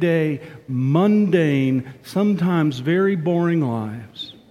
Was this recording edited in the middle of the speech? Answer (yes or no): no